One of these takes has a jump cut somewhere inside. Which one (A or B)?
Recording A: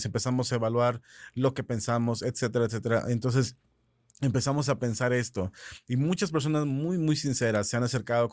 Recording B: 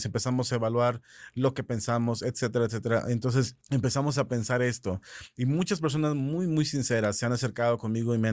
B